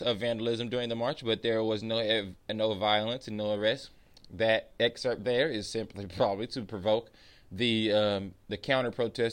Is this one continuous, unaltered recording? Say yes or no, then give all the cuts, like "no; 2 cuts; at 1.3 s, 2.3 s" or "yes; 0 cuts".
yes; 0 cuts